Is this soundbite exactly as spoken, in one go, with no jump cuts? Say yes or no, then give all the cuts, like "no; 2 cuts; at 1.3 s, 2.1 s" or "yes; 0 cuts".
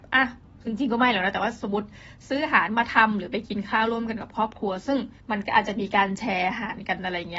no; 1 cut; at 5.2 s